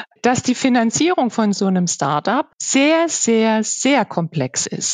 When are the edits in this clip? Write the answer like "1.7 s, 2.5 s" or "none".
2.5 s